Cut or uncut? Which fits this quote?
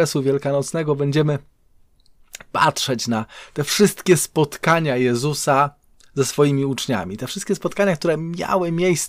uncut